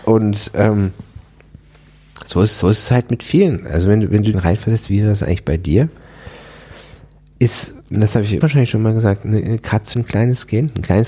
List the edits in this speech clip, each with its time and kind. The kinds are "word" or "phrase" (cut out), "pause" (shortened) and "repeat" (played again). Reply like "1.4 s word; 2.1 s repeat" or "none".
2.6 s repeat; 4.3 s phrase; 4.9 s word; 7.8 s pause; 8.4 s word; 9.9 s phrase